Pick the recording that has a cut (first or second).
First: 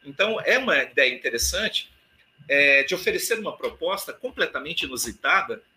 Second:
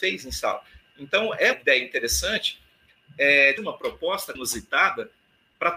second